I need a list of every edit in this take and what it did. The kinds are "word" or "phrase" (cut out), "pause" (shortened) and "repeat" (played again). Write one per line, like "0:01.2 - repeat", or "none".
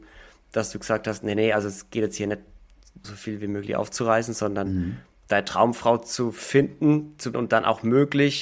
0:03.0 - word
0:07.3 - word

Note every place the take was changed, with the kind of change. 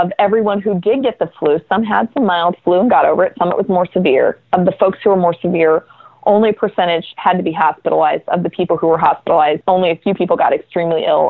none

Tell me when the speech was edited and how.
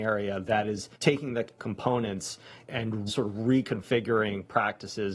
0:00.9 - pause
0:01.6 - word
0:02.7 - word
0:03.1 - word

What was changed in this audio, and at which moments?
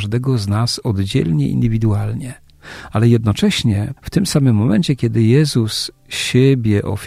0:04.0 - pause

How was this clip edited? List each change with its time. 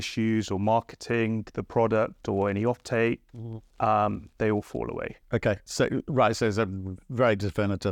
0:03.3 - pause
0:05.2 - pause

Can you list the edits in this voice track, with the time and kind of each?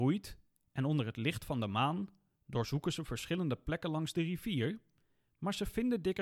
none

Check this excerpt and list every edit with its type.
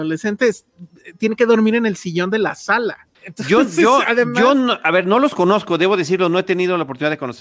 0:03.1 - pause

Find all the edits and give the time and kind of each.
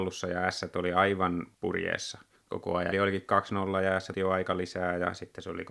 0:01.5 - pause
0:02.4 - pause
0:02.9 - phrase
0:04.1 - word

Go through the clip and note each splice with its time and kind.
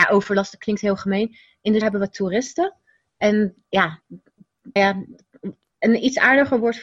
0:01.8 - word
0:04.8 - word

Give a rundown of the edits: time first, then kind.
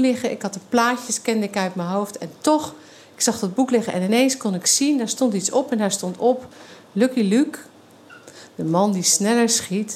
none

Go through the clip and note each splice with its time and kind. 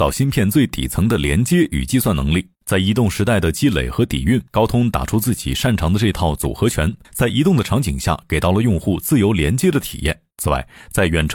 0:02.5 - pause
0:04.5 - pause
0:07.0 - pause
0:10.3 - pause

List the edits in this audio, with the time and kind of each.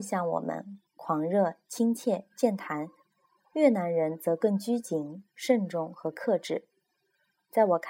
none

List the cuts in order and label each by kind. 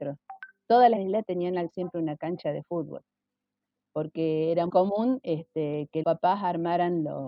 0:01.0 - word
0:01.7 - word
0:04.7 - word
0:06.0 - word

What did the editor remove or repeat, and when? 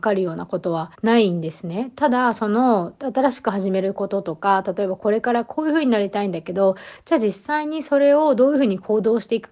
0:00.9 - pause

